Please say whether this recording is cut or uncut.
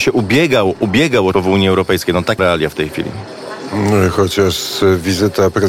cut